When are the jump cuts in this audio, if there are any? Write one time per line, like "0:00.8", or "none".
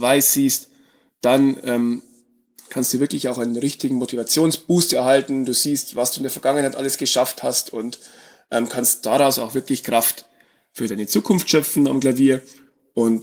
none